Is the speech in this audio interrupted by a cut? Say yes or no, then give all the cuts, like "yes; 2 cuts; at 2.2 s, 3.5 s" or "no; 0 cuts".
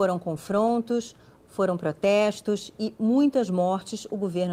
no; 0 cuts